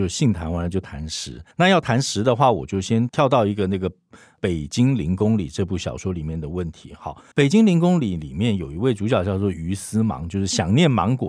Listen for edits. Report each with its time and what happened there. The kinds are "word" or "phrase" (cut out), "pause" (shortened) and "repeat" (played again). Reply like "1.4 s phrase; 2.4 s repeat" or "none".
1.5 s pause; 7.3 s pause